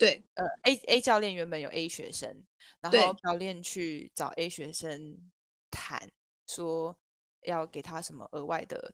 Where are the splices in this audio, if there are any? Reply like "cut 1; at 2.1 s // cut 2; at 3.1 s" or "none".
cut 1; at 3.2 s